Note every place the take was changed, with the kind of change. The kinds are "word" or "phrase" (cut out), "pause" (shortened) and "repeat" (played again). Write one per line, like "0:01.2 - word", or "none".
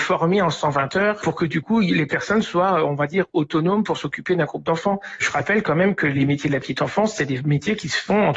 none